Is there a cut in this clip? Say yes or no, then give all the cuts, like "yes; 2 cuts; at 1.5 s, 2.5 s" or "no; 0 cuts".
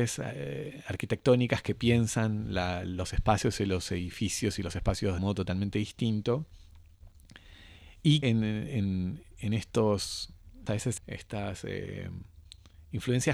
yes; 4 cuts; at 5.2 s, 8.2 s, 10.7 s, 11.0 s